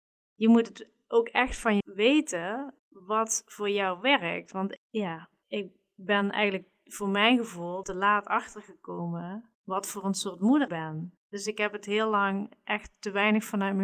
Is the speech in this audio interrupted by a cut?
yes; 8 cuts; at 1.8 s, 2.8 s, 4.8 s, 5.4 s, 7.8 s, 9.5 s, 10.7 s, 11.2 s

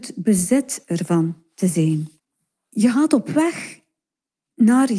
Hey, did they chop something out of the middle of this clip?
yes; 1 cut; at 2.2 s

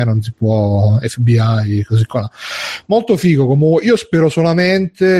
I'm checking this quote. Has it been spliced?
no; 0 cuts

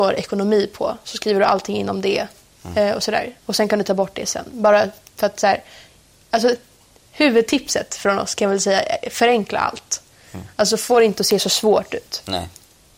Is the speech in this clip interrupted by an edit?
no; 0 cuts

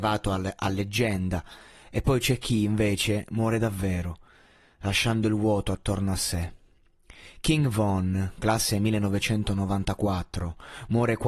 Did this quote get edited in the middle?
no; 0 cuts

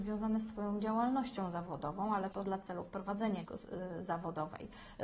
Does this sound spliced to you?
yes; 2 cuts; at 2.3 s, 3.4 s

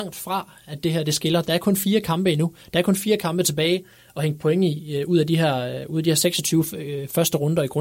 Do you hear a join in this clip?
no; 0 cuts

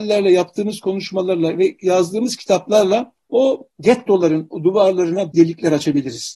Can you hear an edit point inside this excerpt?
yes; 1 cut; at 5.3 s

